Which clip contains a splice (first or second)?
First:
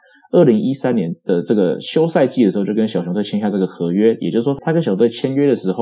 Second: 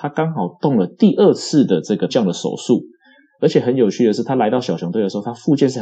second